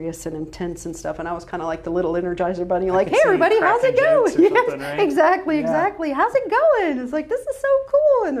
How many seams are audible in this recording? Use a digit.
0